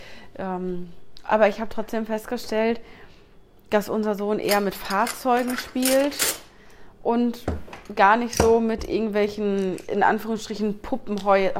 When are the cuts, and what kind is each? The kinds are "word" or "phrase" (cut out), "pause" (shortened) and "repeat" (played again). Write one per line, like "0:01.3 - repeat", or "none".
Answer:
none